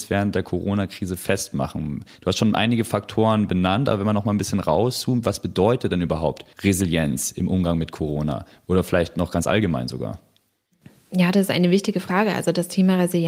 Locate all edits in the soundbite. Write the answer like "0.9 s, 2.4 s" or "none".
6.5 s